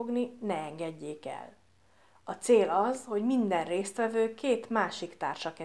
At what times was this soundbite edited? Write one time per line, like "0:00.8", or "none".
none